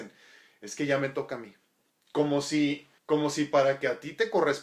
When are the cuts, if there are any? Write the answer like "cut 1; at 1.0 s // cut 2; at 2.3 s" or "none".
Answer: cut 1; at 1.9 s // cut 2; at 3.0 s